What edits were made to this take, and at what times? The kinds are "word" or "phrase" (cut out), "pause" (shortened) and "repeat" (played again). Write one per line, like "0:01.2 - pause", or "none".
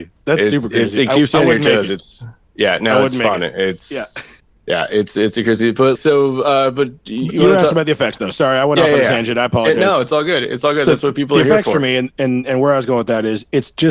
0:04.4 - pause
0:06.0 - word